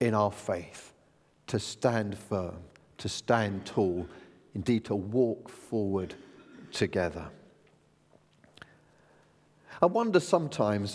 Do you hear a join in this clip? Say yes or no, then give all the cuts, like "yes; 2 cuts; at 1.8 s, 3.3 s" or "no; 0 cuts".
no; 0 cuts